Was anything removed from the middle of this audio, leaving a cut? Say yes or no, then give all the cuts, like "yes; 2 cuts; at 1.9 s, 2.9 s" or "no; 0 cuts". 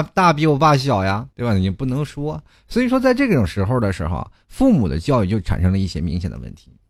yes; 1 cut; at 1.3 s